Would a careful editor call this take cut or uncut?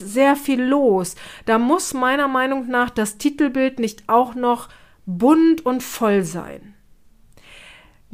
uncut